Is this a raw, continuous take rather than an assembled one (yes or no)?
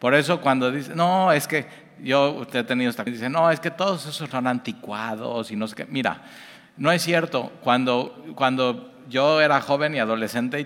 no